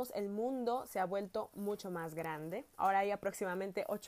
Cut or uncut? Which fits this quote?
cut